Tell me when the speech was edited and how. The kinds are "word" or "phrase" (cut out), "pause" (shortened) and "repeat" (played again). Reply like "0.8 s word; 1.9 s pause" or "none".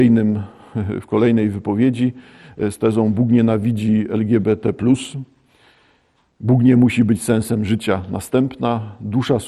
none